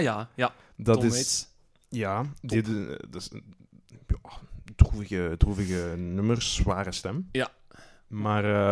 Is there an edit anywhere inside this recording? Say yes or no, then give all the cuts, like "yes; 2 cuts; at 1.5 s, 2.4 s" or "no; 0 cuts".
no; 0 cuts